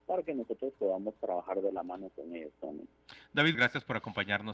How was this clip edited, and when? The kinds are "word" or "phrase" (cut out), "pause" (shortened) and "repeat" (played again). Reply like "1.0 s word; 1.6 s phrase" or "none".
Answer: 3.5 s word